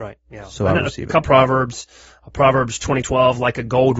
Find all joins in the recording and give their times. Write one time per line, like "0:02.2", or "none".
0:01.2
0:03.0